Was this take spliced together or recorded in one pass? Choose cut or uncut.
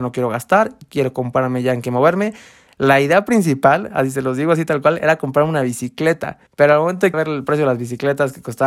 cut